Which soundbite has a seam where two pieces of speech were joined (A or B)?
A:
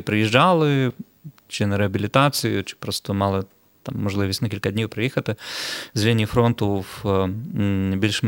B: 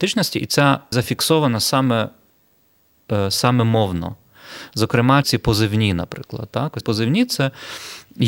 B